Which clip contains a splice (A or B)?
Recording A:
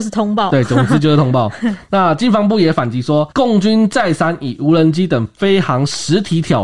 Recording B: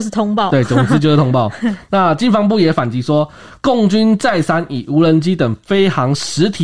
A